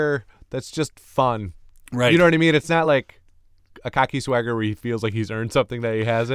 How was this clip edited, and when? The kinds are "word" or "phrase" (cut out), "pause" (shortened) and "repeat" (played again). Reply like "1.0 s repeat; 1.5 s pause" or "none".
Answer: none